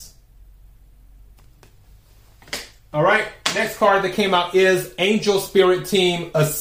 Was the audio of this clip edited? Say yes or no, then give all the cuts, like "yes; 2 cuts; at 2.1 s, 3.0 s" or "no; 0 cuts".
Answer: no; 0 cuts